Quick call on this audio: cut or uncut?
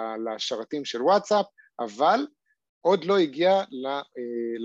uncut